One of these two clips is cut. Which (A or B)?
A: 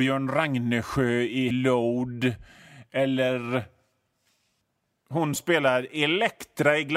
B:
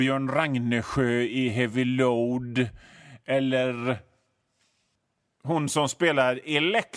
A